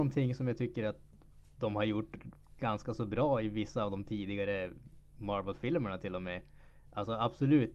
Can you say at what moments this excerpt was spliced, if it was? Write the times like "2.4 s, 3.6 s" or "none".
none